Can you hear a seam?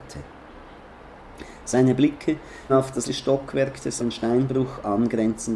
yes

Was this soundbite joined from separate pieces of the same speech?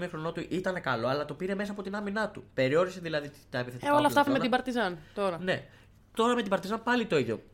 yes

